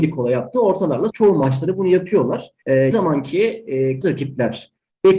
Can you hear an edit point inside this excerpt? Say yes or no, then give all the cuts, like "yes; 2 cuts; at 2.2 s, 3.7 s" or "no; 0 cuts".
yes; 3 cuts; at 1.1 s, 2.9 s, 4.0 s